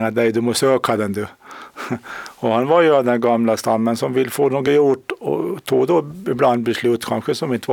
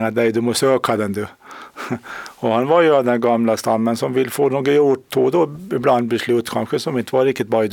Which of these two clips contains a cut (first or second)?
second